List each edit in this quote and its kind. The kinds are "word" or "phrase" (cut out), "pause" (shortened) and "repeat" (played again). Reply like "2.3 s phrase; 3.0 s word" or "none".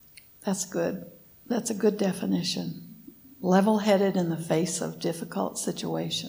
none